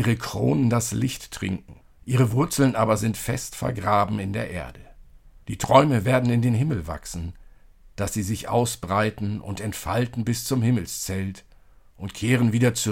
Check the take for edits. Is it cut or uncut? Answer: cut